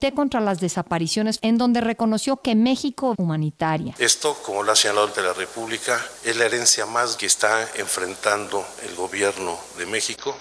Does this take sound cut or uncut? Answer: cut